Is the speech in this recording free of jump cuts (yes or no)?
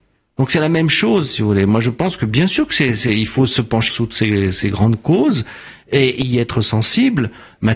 no